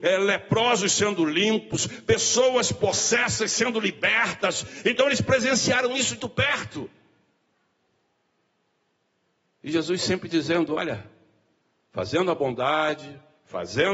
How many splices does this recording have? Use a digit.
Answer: 1